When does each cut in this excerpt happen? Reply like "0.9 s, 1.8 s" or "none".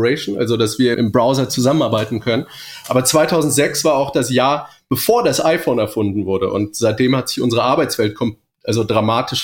0.9 s